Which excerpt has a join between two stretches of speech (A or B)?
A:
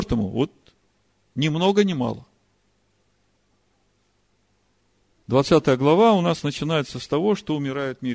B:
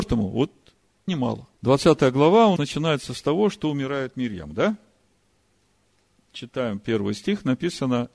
B